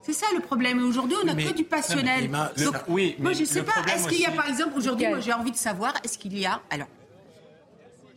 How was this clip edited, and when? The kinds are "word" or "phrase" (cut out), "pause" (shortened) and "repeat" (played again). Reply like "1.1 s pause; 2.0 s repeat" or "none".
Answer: none